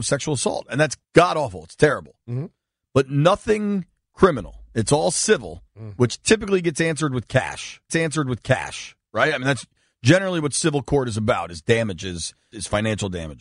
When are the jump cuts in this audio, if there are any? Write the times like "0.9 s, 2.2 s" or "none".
1.0 s, 5.7 s, 7.9 s, 12.5 s